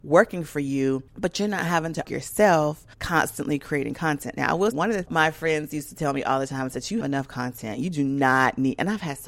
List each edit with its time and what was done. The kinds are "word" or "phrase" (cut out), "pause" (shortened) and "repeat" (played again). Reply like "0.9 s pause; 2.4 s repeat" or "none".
1.1 s pause; 2.0 s word; 2.9 s pause; 4.7 s word; 5.1 s phrase; 7.0 s word